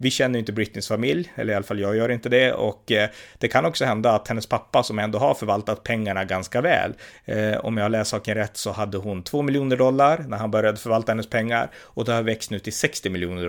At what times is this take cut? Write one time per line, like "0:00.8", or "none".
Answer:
none